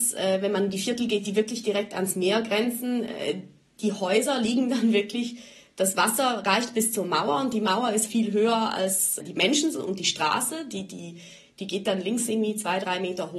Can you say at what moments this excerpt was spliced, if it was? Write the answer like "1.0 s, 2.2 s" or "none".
8.1 s